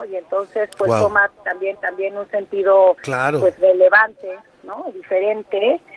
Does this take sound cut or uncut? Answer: cut